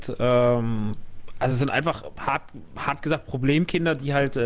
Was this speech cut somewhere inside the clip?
no; 0 cuts

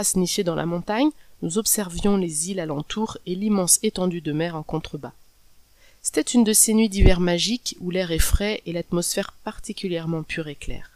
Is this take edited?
no; 0 cuts

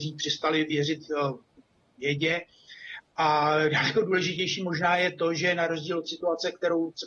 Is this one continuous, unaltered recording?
yes; 0 cuts

